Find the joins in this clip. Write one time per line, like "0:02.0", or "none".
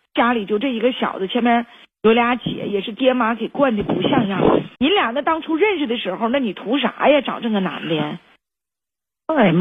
0:04.7